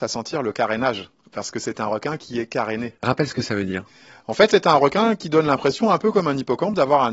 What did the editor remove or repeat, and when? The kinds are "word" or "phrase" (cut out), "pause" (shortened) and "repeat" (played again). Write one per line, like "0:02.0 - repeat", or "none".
none